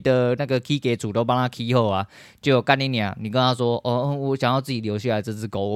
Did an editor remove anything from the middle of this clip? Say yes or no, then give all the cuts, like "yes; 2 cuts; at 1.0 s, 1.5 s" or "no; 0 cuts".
no; 0 cuts